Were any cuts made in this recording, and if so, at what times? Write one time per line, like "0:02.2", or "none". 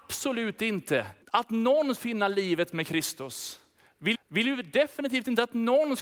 0:01.2
0:01.9
0:04.1

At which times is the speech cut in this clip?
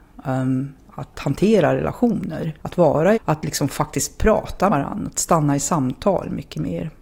0:02.6
0:03.1
0:04.7

